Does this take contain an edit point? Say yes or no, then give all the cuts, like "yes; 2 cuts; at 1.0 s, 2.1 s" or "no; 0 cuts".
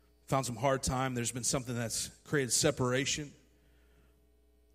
no; 0 cuts